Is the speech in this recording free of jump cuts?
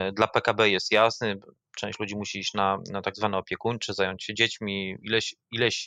yes; 0 cuts

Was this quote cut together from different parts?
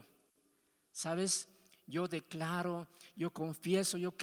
no; 0 cuts

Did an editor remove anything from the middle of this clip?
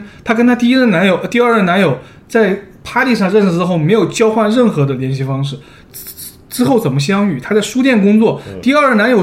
no; 0 cuts

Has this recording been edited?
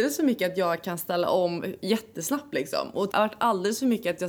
yes; 1 cut; at 3.1 s

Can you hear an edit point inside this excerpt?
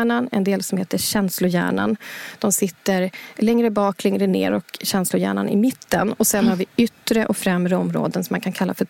no; 0 cuts

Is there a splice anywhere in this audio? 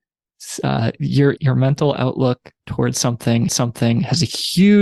yes; 2 cuts; at 1.4 s, 3.5 s

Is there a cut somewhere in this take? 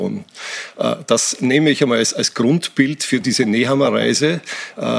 no; 0 cuts

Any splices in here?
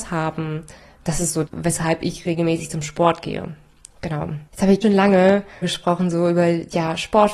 yes; 4 cuts; at 1.5 s, 4.5 s, 4.8 s, 5.6 s

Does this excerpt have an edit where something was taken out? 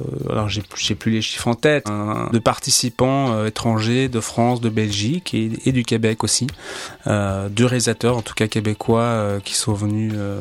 yes; 2 cuts; at 1.8 s, 2.3 s

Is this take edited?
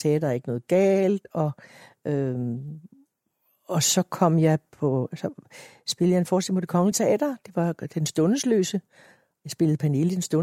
no; 0 cuts

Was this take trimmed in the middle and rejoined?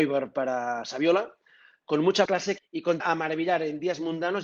yes; 3 cuts; at 2.3 s, 2.6 s, 3.0 s

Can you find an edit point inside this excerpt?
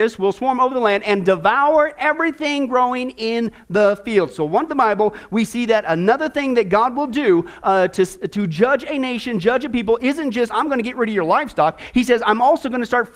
yes; 1 cut; at 4.7 s

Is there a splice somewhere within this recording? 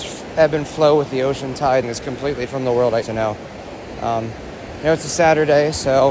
yes; 3 cuts; at 1.8 s, 2.5 s, 3.0 s

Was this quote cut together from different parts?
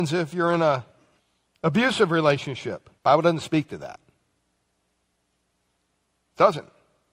yes; 2 cuts; at 1.2 s, 3.0 s

